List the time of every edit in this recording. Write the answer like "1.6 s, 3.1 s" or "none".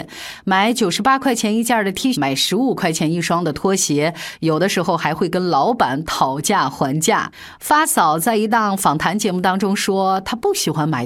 2.1 s